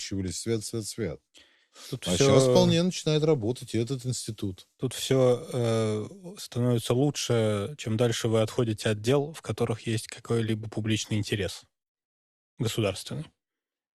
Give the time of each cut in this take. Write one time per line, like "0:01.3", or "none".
none